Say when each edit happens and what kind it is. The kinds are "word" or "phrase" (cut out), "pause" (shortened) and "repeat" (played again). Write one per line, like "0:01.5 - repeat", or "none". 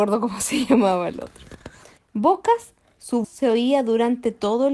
0:02.0 - pause
0:03.2 - word